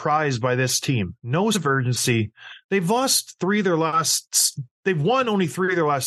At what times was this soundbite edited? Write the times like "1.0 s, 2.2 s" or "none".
1.5 s, 4.7 s